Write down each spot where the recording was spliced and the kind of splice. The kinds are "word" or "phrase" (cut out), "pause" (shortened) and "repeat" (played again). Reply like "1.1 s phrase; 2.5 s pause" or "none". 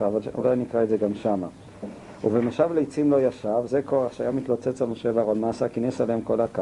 none